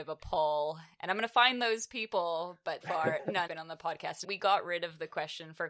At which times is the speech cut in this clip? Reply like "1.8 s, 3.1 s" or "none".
2.8 s, 3.5 s, 4.2 s